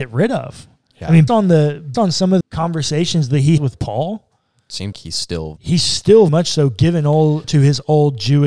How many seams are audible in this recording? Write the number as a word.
eight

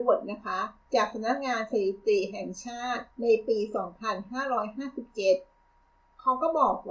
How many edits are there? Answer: one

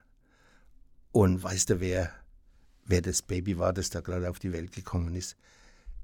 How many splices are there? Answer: zero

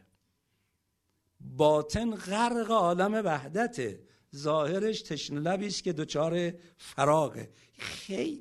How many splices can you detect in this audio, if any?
zero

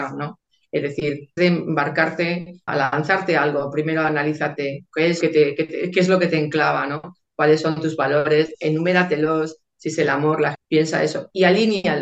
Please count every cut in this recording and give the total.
four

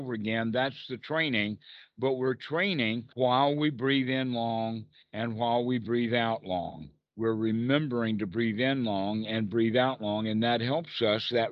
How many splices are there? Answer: two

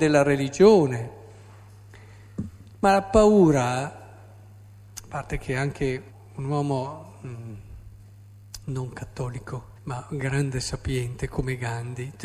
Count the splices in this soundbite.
three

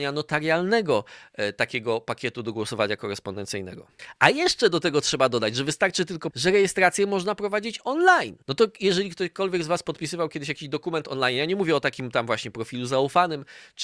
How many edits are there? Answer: two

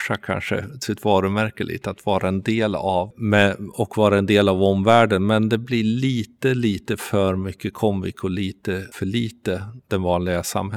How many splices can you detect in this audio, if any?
zero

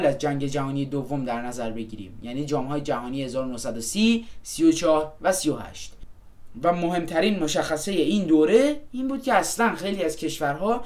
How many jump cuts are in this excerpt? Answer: zero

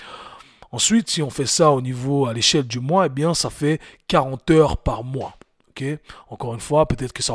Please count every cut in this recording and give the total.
zero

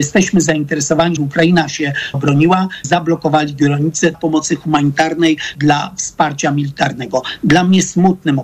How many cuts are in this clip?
five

